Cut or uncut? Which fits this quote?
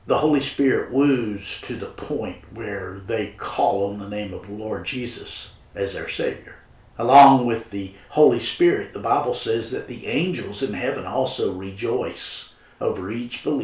cut